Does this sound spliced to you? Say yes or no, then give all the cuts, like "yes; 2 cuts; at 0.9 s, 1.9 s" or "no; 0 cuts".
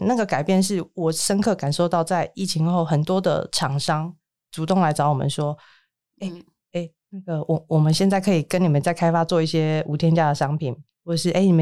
no; 0 cuts